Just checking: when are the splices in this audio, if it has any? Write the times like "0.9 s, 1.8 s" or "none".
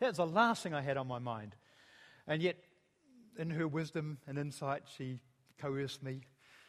none